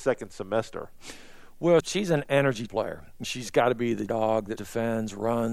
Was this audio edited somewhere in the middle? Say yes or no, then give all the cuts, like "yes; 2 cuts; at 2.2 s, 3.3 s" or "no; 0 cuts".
yes; 5 cuts; at 1.8 s, 2.7 s, 3.2 s, 4.1 s, 4.6 s